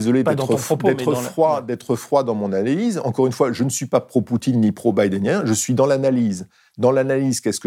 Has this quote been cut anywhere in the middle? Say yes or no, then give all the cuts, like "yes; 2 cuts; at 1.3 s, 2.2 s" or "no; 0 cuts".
no; 0 cuts